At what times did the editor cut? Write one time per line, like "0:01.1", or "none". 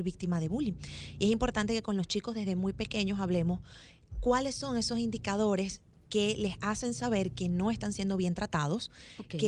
none